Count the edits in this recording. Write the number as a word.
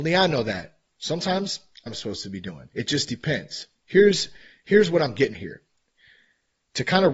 four